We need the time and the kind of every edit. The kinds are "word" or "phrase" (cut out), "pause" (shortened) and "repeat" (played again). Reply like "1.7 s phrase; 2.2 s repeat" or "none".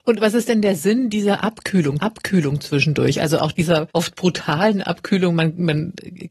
2.0 s repeat; 3.9 s pause